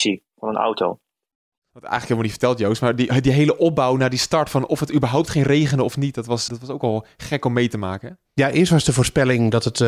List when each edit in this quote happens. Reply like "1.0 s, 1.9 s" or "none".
6.5 s